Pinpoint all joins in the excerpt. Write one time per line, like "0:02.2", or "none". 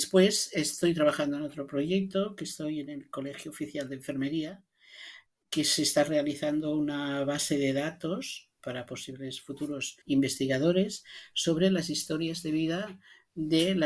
0:05.3
0:08.6
0:10.0